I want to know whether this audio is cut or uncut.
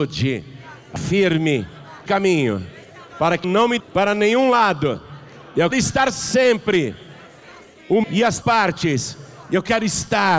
cut